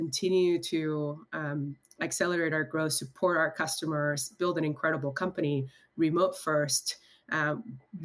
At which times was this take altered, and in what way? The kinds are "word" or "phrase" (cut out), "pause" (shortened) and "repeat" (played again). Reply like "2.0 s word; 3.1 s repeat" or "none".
none